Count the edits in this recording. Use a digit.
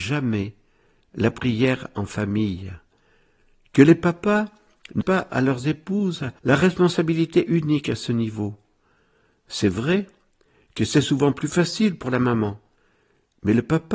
2